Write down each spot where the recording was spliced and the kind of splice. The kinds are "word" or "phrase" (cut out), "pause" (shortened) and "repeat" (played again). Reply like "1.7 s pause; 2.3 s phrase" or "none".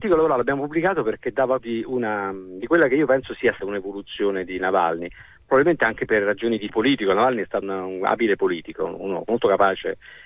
1.0 s word; 1.6 s word; 3.6 s word; 6.7 s word; 7.6 s word; 9.3 s word